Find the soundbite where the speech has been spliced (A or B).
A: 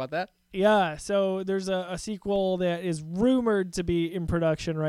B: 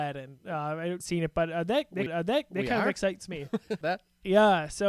B